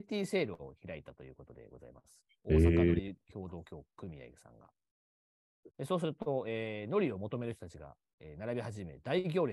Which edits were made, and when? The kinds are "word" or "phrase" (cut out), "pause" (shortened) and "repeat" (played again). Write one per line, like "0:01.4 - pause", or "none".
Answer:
0:05.7 - pause